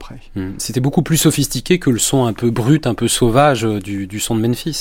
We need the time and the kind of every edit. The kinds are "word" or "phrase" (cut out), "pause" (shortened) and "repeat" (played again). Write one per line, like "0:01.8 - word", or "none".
none